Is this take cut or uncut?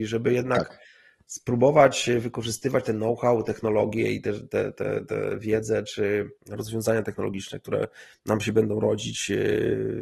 cut